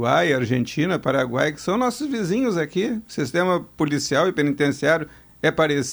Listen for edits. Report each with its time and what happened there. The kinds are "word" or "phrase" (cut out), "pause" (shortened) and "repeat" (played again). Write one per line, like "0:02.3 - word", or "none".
none